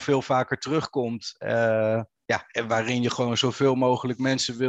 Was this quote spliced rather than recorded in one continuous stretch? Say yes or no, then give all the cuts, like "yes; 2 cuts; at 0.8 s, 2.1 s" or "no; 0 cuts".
no; 0 cuts